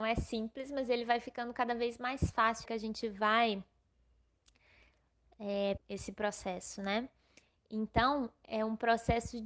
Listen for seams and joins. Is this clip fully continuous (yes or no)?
no